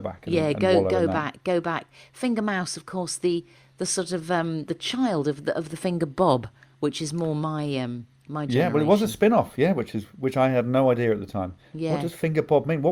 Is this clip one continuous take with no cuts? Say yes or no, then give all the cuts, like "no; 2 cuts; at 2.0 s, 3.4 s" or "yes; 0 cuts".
yes; 0 cuts